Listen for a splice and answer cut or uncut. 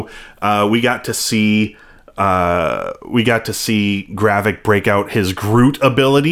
uncut